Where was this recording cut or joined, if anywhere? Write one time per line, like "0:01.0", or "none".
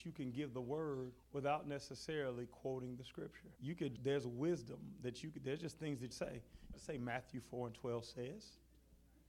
0:01.2
0:03.6
0:04.0
0:06.1
0:06.7